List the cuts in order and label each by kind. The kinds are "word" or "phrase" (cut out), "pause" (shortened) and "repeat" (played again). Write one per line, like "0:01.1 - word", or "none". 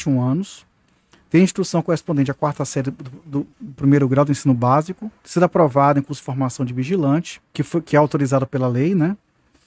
0:03.5 - pause
0:05.2 - pause
0:07.5 - pause